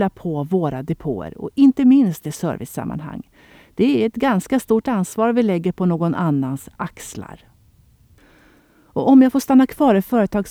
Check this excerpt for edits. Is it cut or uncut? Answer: uncut